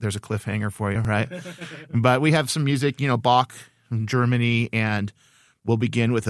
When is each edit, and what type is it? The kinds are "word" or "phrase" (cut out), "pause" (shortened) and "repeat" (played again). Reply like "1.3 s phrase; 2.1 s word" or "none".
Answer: none